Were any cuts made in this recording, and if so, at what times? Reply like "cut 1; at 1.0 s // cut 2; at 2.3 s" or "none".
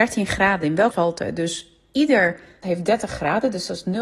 cut 1; at 0.9 s // cut 2; at 2.6 s

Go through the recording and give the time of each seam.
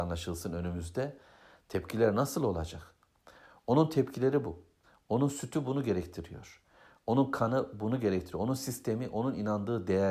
none

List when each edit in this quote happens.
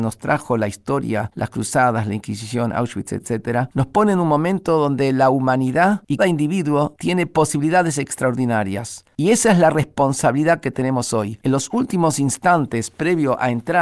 cut 1; at 6.2 s

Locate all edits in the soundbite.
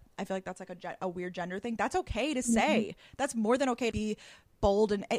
cut 1; at 1.8 s // cut 2; at 3.9 s

